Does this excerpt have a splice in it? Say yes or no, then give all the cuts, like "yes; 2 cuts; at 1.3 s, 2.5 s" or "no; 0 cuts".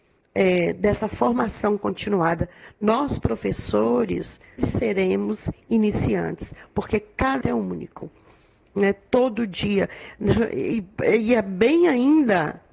yes; 2 cuts; at 4.6 s, 7.4 s